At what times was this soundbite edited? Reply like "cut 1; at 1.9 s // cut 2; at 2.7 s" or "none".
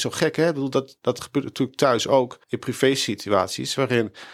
cut 1; at 2.4 s